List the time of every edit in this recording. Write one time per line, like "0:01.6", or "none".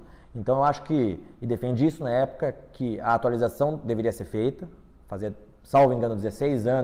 none

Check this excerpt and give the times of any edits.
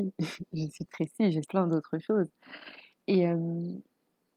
0:01.4

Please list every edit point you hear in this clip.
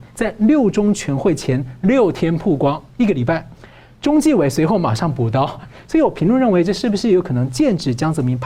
none

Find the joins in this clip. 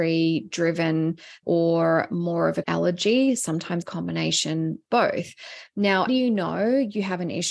0:01.4
0:02.6
0:03.8
0:04.9
0:06.1

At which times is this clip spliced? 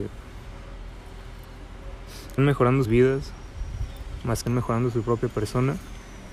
0:02.4
0:02.8
0:04.5

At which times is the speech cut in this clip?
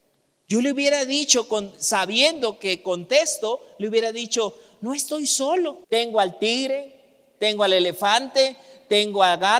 0:05.8

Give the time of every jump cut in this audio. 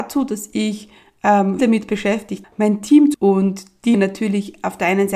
0:01.6
0:02.4
0:03.1
0:03.9

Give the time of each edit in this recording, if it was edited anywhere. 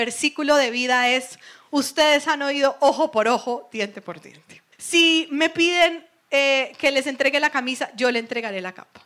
0:04.7

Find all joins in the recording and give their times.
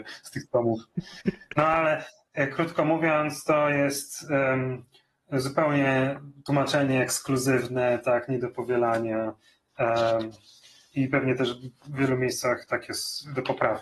none

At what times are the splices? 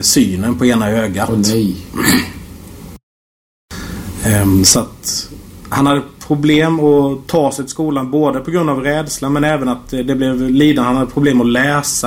none

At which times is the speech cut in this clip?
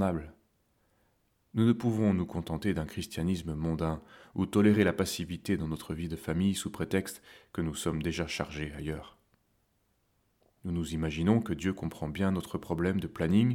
none

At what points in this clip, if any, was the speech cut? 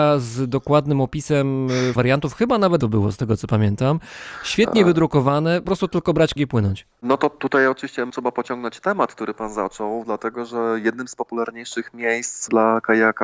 0:02.0
0:02.8
0:05.6
0:06.4

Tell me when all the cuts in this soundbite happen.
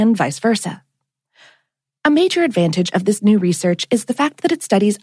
none

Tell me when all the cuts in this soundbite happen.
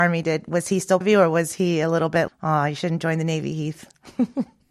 0:01.0
0:02.3

